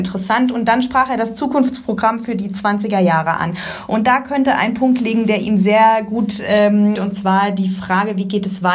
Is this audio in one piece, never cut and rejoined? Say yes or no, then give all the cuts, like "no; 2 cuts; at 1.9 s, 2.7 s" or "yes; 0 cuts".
no; 1 cut; at 7.0 s